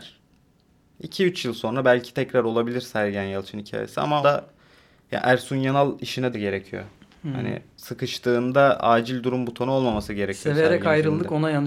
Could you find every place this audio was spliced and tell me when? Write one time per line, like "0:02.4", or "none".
0:04.2
0:06.3

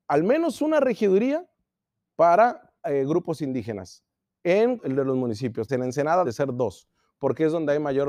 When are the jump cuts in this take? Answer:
0:02.8
0:04.8
0:05.7
0:06.2

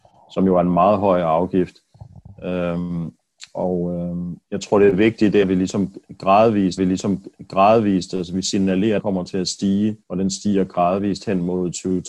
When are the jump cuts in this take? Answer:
0:04.4
0:05.4
0:06.8
0:09.0
0:10.0

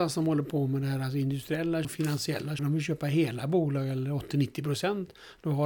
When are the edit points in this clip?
0:01.8
0:02.6

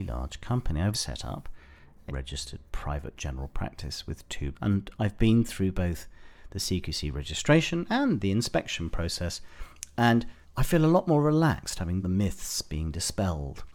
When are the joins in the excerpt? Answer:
0:00.9
0:02.1
0:04.5
0:10.4
0:12.0

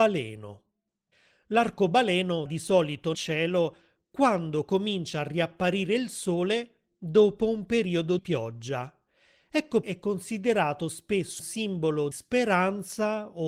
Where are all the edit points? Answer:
0:02.5
0:03.1
0:08.2
0:09.8
0:11.4
0:12.1

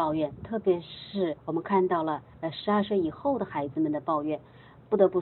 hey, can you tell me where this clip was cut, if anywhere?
0:01.4
0:02.3

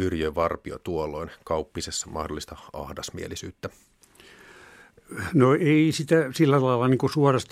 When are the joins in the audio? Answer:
none

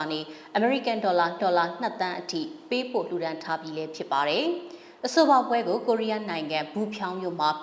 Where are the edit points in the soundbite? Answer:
0:01.4

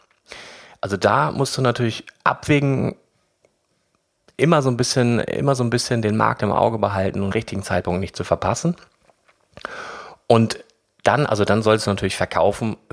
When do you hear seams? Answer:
0:07.3

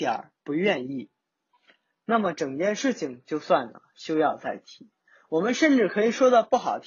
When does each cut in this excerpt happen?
none

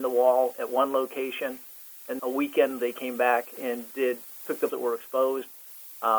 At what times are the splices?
0:02.2
0:02.8
0:04.4
0:04.7

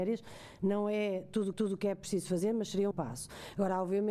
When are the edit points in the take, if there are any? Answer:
0:01.5
0:02.9

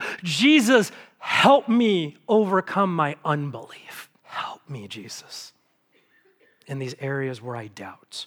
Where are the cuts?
0:04.2

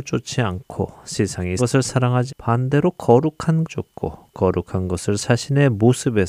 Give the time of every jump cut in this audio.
0:01.6
0:02.3
0:03.6
0:05.2

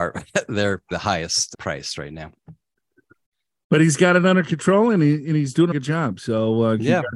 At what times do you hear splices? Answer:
0:00.9
0:05.7

